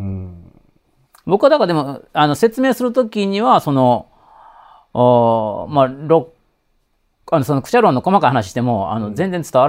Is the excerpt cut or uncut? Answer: uncut